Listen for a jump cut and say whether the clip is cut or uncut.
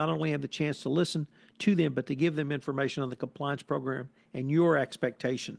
uncut